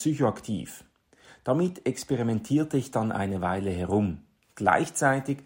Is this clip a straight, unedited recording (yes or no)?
yes